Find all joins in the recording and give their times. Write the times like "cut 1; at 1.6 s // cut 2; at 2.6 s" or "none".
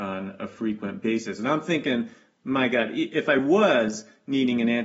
none